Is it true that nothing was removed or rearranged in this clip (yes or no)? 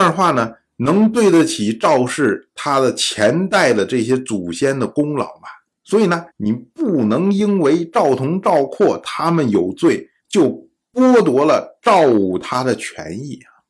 no